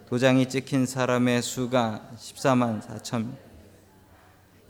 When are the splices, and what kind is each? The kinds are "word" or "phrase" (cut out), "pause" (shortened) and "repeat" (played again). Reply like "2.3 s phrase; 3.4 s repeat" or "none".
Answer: none